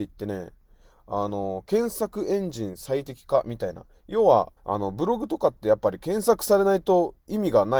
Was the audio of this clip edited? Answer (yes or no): yes